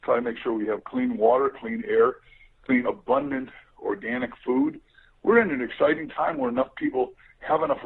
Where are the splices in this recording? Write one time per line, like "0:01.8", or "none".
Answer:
0:02.8